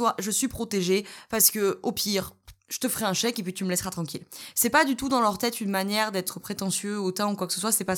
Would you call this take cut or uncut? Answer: uncut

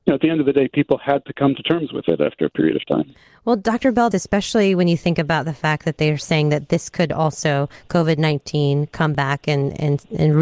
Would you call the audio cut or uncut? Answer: cut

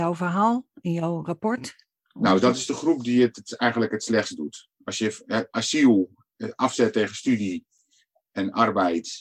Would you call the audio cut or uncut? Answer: uncut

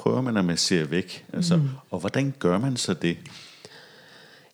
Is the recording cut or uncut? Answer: uncut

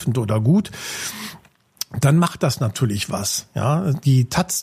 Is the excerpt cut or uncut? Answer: uncut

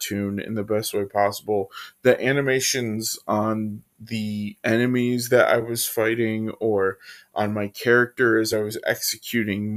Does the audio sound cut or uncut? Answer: uncut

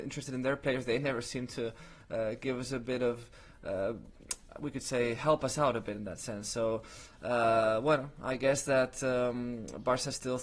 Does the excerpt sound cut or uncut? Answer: uncut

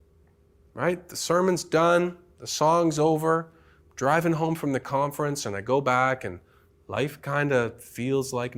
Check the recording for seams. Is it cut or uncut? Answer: uncut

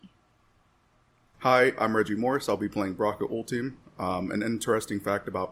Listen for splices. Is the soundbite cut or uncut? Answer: uncut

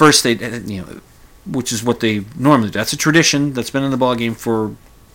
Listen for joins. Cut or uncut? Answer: uncut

